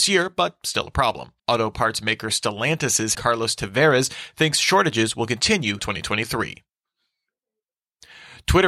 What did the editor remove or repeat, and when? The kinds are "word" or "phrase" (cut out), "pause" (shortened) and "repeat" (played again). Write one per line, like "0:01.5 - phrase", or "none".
0:01.4 - pause
0:03.1 - word
0:05.8 - word